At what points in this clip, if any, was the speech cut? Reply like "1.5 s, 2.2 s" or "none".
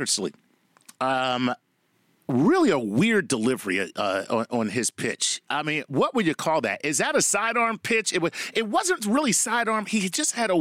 none